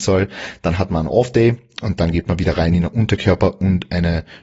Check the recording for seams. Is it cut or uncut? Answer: uncut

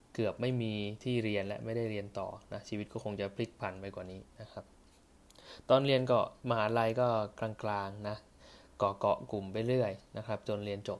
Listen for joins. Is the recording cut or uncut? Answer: cut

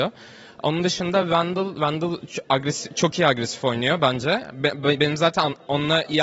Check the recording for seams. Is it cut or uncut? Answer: uncut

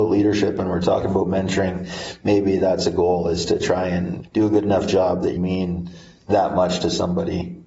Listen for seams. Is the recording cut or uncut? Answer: cut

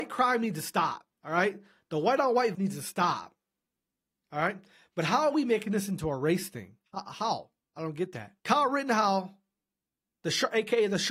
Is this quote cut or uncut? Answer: cut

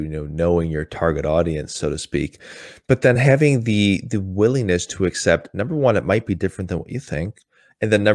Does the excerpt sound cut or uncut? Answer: uncut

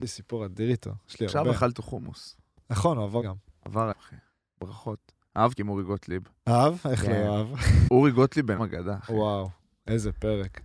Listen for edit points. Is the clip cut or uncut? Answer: cut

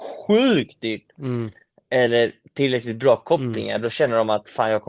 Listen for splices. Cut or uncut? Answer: uncut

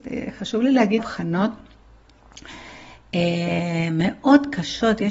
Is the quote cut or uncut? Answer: cut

